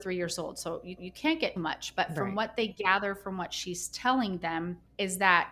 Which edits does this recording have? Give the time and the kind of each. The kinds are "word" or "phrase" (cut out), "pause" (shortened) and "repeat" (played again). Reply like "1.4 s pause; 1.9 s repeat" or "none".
1.0 s repeat; 1.6 s word